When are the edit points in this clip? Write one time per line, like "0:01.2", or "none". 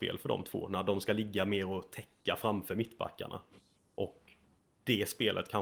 none